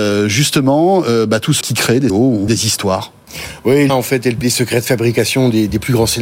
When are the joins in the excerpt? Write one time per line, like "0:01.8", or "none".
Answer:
0:01.6
0:02.1
0:02.5
0:03.9
0:04.4